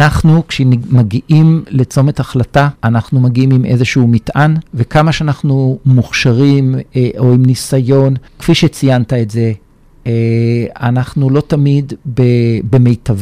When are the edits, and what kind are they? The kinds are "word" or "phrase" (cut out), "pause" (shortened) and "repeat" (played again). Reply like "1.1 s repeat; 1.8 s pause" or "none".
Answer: 2.8 s pause; 4.7 s pause; 8.3 s pause